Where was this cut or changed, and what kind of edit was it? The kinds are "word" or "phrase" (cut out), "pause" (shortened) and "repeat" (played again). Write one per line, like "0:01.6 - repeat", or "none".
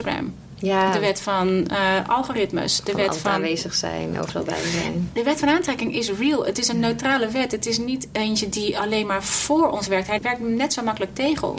none

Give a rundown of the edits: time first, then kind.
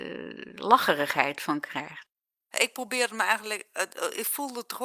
none

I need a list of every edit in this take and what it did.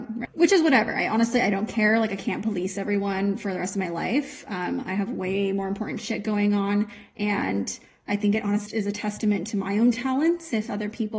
0:08.7 - word

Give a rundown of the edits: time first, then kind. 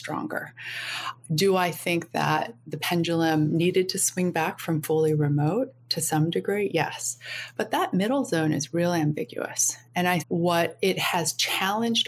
0:10.2 - word

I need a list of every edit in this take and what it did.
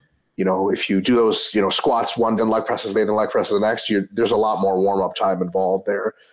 0:01.0 - word
0:02.4 - word
0:02.9 - phrase

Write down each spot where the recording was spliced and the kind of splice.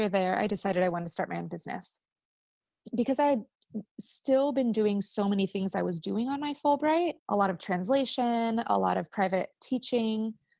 0:07.2 - pause

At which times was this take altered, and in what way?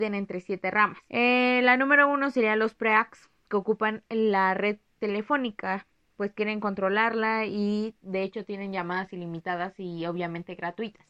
0:01.1 - pause
0:03.4 - pause

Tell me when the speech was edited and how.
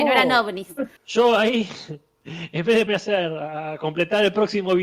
0:01.0 - pause
0:02.9 - word

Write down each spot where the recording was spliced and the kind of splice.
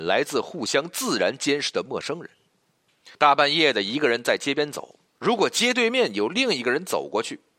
0:03.1 - pause

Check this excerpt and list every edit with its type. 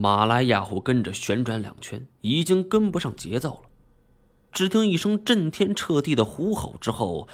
0:02.1 - pause

